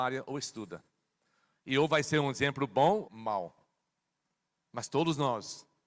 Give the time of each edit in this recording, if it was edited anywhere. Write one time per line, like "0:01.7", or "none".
0:03.0